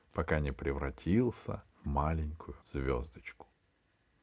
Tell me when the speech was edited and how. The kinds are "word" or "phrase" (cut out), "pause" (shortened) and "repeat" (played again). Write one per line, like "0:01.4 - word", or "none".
0:01.7 - pause
0:02.6 - pause